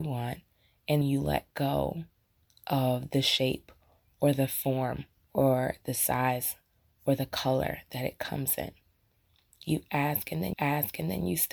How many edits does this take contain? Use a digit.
3